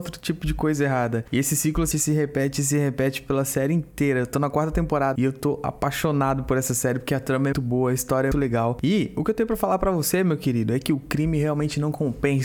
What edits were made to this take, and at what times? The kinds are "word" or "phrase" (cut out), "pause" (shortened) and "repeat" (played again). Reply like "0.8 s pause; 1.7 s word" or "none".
1.9 s word; 5.2 s word; 7.5 s word; 8.3 s word